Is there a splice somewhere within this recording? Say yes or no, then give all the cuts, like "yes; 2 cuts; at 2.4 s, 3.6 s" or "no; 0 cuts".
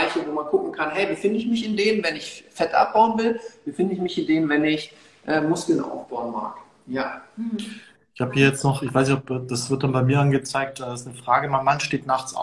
no; 0 cuts